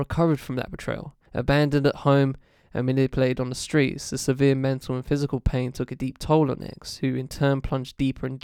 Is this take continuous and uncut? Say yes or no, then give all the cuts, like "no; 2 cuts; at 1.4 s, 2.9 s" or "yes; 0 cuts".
no; 1 cut; at 1.2 s